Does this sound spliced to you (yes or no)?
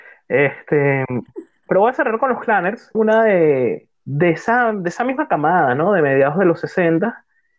yes